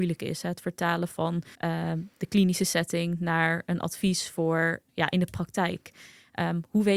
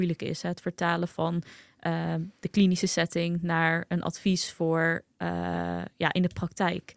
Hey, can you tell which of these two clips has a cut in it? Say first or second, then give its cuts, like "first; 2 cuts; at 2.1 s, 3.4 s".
first; 2 cuts; at 1.5 s, 4.9 s